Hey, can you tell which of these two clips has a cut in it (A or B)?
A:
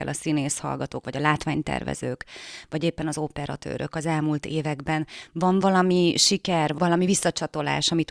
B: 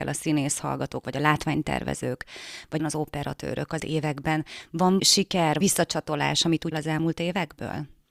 B